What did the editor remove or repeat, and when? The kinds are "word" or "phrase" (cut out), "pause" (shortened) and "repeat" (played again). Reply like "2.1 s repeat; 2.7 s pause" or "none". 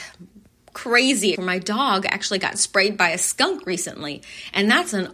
1.3 s word